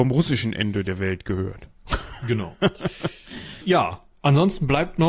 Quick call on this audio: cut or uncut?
cut